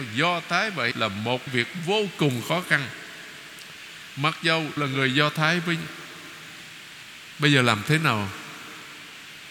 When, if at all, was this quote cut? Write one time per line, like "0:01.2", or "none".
0:00.9
0:01.5
0:04.8